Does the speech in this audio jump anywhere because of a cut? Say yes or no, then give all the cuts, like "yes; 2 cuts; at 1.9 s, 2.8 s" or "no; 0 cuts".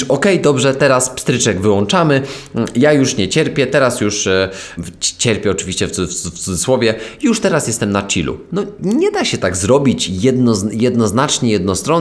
yes; 1 cut; at 4.8 s